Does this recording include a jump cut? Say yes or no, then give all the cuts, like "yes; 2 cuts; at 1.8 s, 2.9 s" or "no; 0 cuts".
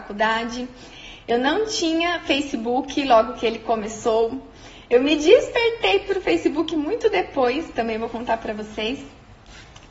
no; 0 cuts